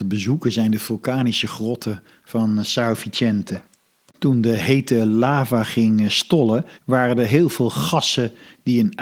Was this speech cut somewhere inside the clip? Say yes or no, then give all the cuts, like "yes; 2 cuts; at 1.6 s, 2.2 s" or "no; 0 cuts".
yes; 2 cuts; at 3.7 s, 6.7 s